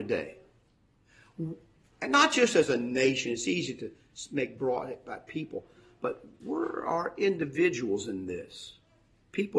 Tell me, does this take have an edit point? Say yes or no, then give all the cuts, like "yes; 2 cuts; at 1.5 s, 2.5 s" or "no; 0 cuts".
no; 0 cuts